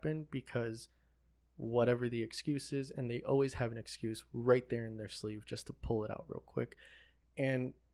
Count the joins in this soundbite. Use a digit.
0